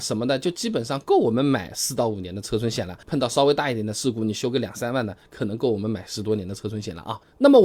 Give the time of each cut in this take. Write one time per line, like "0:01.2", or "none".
0:03.0